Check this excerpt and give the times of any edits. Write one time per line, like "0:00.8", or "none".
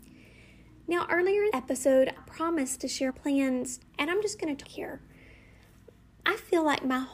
0:01.5
0:02.2
0:03.1
0:03.8
0:04.6